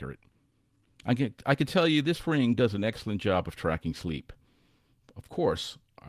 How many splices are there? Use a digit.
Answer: 0